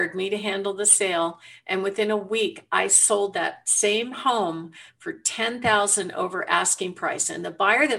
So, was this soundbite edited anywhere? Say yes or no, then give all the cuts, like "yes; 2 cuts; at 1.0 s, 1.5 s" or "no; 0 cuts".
no; 0 cuts